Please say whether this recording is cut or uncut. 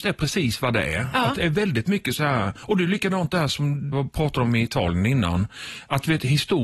cut